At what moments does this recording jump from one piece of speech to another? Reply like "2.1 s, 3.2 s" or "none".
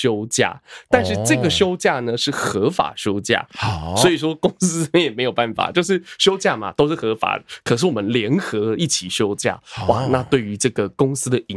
none